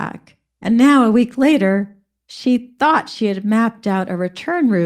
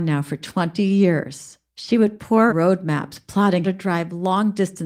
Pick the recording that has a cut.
second; 3 cuts; at 1.7 s, 2.5 s, 3.6 s

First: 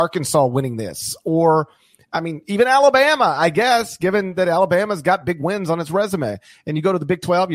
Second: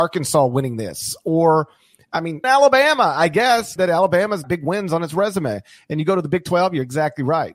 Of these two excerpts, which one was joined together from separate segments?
second; 3 cuts; at 2.4 s, 3.8 s, 4.4 s

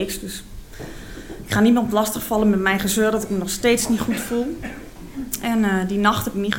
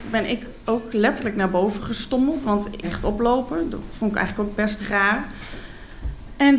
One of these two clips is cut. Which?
second; 1 cut; at 2.8 s

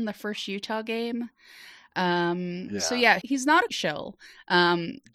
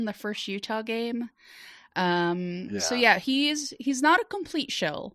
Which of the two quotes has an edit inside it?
first; 2 cuts; at 3.2 s, 3.7 s

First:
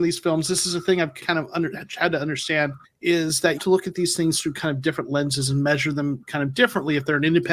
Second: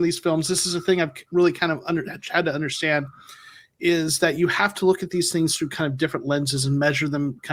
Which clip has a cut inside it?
first; 3 cuts; at 1.2 s, 2.8 s, 3.6 s

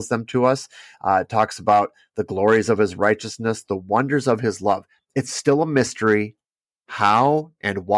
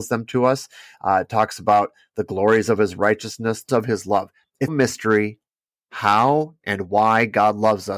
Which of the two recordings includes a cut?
second; 2 cuts; at 3.7 s, 4.7 s

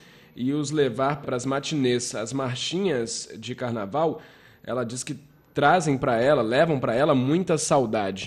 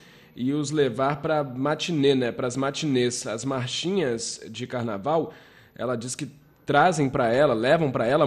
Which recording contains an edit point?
first; 1 cut; at 1.2 s

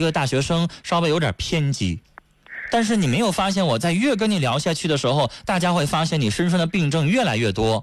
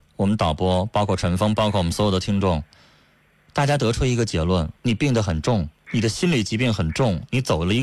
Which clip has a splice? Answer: second; 2 cuts; at 4.8 s, 5.8 s

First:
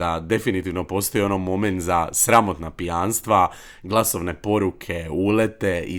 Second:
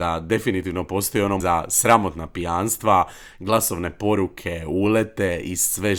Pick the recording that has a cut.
second; 1 cut; at 1.4 s

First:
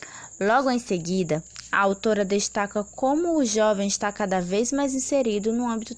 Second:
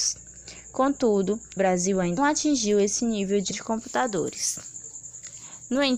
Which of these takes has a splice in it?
second; 3 cuts; at 1.6 s, 2.2 s, 3.5 s

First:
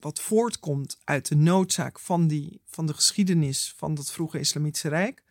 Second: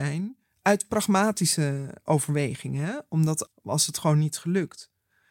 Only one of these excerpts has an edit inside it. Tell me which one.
second; 1 cut; at 3.5 s

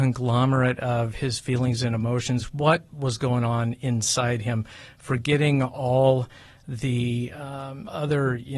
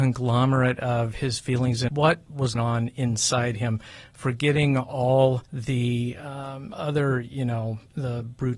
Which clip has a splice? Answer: second; 3 cuts; at 1.9 s, 2.5 s, 5.4 s

